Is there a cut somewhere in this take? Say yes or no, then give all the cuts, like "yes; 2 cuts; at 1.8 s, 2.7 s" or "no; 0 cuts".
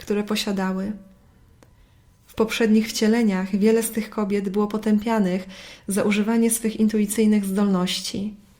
no; 0 cuts